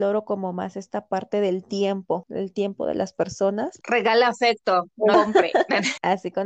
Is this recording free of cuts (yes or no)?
no